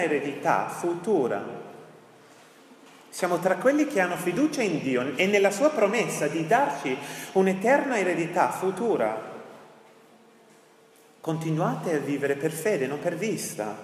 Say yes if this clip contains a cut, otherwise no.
no